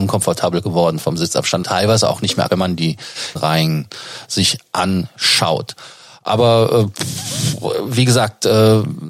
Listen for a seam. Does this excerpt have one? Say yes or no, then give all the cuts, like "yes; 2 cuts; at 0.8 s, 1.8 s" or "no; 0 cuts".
yes; 4 cuts; at 1.0 s, 1.6 s, 2.5 s, 3.4 s